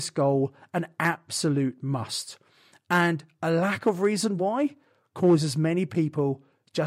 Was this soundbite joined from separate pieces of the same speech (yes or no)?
no